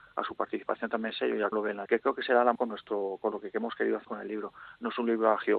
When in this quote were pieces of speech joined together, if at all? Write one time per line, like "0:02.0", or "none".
0:01.1
0:01.5
0:01.9
0:02.6
0:04.0